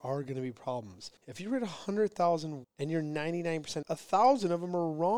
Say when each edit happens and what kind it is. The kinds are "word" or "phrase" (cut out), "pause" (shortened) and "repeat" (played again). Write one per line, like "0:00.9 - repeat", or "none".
0:01.2 - pause
0:02.6 - word
0:03.8 - word